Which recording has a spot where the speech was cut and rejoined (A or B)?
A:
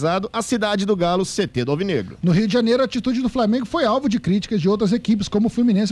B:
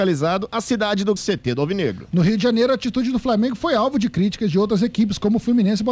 B